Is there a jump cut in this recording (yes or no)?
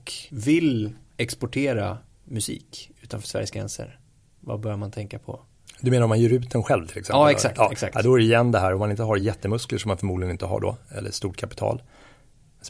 no